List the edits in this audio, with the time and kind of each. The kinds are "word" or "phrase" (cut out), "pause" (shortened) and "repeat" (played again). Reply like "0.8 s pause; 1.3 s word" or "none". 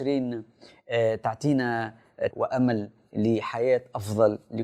2.3 s word